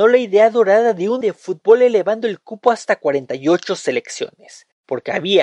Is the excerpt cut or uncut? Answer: cut